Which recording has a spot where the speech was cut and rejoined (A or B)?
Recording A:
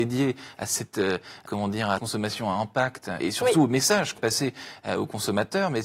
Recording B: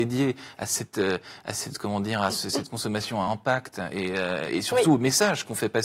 A